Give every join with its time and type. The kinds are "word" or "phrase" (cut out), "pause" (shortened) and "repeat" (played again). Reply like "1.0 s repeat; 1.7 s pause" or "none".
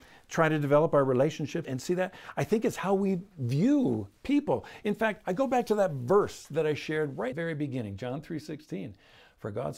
1.6 s word; 4.2 s pause; 7.3 s phrase